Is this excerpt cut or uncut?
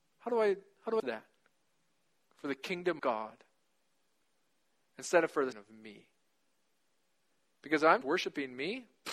cut